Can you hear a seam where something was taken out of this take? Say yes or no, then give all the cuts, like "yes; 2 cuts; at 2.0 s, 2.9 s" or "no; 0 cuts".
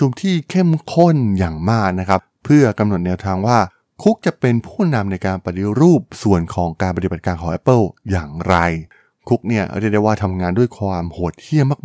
no; 0 cuts